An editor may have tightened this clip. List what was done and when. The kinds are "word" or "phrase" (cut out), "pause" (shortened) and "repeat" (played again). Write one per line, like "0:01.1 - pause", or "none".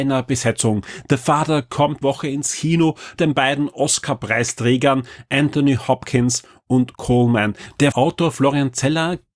0:02.0 - word
0:03.2 - word
0:06.9 - word
0:07.9 - word